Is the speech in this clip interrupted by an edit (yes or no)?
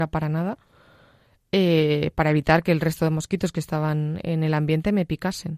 no